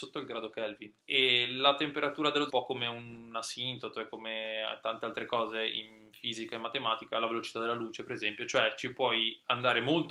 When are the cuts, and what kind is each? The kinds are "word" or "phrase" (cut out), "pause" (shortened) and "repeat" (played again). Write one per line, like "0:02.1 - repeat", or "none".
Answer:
0:01.0 - pause
0:02.5 - phrase